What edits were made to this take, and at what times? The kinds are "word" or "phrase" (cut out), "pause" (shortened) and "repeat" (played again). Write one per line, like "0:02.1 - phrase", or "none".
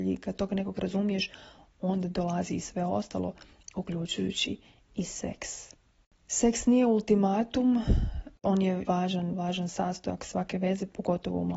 0:08.9 - word
0:09.3 - word